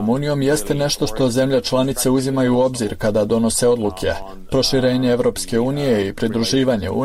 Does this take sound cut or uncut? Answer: uncut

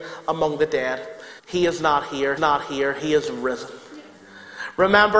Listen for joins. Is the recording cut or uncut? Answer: cut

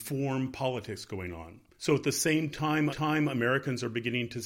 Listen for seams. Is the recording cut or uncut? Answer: cut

